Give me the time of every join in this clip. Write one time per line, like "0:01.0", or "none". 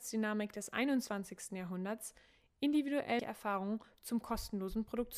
0:03.2

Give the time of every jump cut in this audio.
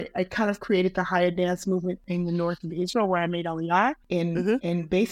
0:04.0

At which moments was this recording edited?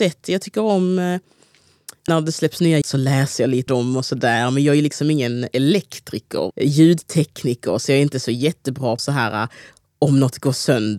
0:02.1
0:02.8
0:03.7
0:06.5
0:09.0

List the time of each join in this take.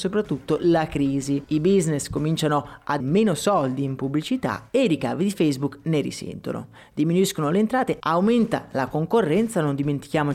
0:03.0

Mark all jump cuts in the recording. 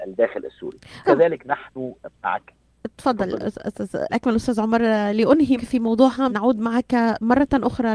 0:01.0
0:04.1
0:05.6
0:06.3

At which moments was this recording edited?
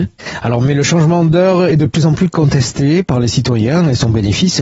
none

